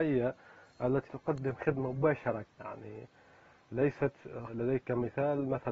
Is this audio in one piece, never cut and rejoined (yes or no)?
no